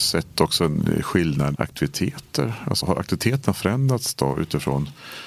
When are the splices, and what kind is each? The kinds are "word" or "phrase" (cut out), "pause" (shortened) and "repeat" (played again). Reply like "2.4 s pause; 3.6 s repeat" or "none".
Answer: 1.5 s word; 2.8 s word